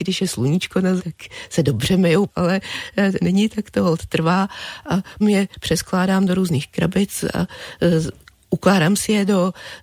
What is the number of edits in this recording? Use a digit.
4